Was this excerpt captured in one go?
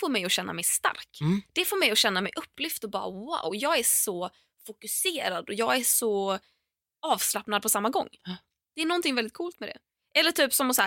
yes; 0 cuts

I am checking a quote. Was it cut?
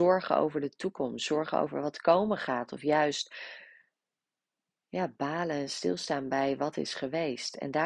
no; 0 cuts

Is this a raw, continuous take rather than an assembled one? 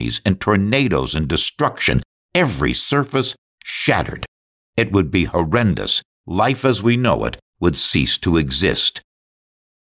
yes; 0 cuts

